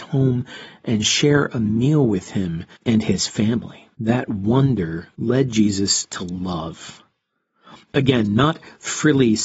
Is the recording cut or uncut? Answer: cut